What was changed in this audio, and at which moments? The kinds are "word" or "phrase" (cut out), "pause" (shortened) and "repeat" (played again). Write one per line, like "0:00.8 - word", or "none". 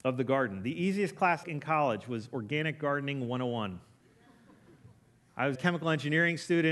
0:01.4 - phrase
0:05.5 - word